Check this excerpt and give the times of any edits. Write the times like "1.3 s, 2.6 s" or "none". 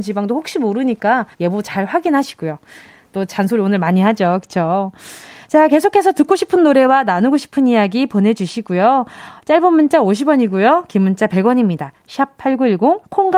1.3 s